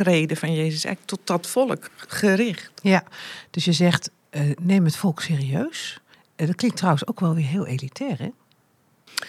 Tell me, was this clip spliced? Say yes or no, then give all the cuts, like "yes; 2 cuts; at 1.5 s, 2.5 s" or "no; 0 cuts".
yes; 1 cut; at 6.1 s